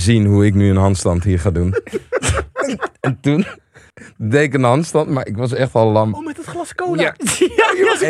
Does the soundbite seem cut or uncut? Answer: uncut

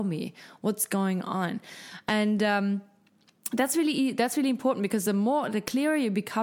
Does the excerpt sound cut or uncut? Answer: uncut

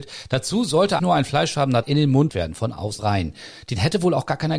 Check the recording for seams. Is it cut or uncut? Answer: cut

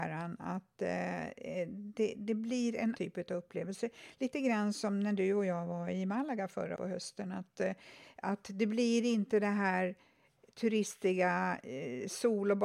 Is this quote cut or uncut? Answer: cut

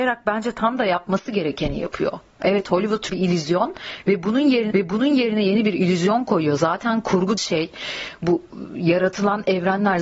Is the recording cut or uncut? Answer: cut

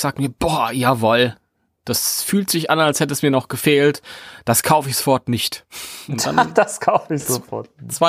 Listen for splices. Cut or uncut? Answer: uncut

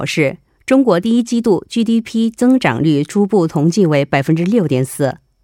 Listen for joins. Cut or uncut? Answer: uncut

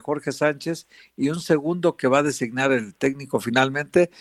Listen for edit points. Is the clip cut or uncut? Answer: uncut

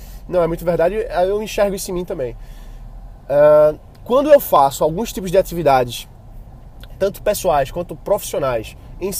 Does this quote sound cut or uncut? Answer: uncut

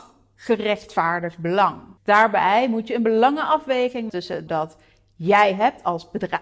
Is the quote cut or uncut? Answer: cut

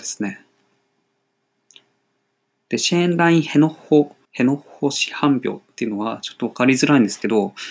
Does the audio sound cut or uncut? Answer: cut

